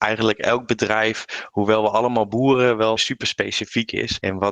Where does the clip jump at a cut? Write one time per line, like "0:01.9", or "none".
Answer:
0:03.0